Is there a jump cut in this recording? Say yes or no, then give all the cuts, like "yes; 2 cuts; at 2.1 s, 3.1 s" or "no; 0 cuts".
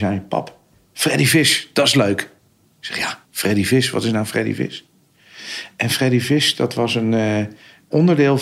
yes; 1 cut; at 3.2 s